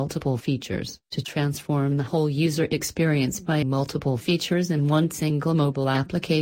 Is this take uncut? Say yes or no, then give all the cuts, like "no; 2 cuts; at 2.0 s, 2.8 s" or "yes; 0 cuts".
no; 2 cuts; at 1.0 s, 3.6 s